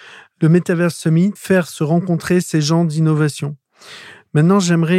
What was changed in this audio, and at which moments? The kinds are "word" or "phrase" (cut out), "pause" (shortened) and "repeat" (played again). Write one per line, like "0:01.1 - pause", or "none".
0:01.4 - word